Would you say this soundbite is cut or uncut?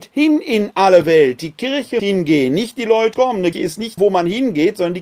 cut